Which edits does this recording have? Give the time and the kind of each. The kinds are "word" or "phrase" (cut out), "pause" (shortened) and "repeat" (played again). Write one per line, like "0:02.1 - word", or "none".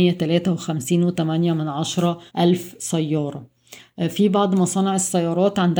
0:02.3 - pause